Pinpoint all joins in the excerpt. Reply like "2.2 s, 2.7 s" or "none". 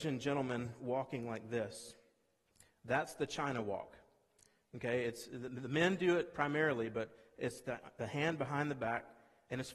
none